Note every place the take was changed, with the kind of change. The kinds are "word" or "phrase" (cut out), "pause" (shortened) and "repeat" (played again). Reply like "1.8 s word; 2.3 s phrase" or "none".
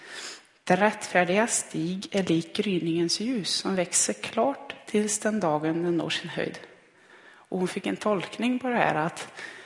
none